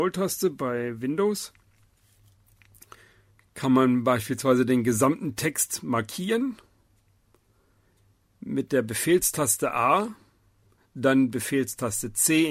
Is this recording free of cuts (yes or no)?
yes